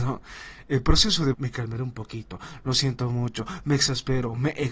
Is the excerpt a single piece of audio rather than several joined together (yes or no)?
no